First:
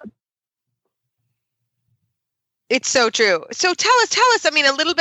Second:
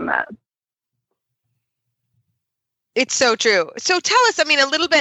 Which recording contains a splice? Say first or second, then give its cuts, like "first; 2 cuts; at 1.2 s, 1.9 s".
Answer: first; 1 cut; at 4.1 s